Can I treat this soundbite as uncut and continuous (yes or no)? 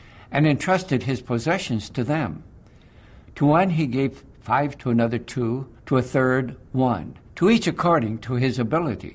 no